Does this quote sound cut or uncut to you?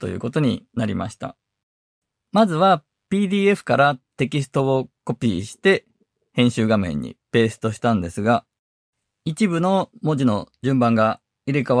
uncut